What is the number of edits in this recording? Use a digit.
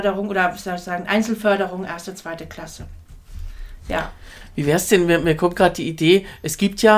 0